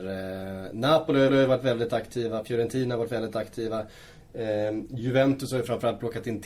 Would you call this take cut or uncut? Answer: cut